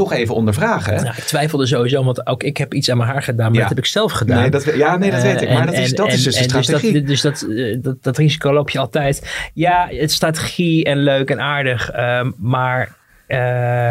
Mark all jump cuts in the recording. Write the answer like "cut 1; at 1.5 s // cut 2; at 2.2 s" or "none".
none